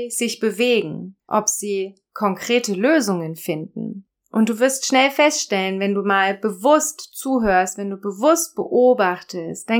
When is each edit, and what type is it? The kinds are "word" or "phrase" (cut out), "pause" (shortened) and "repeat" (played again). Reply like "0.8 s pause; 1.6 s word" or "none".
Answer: 1.2 s pause; 4.1 s pause